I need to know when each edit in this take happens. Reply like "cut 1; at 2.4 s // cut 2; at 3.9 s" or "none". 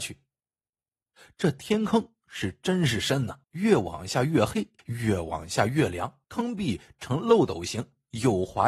cut 1; at 3.4 s // cut 2; at 4.8 s // cut 3; at 6.2 s